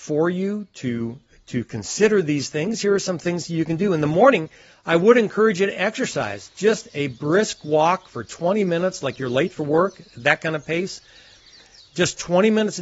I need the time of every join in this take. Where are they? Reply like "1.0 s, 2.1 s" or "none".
none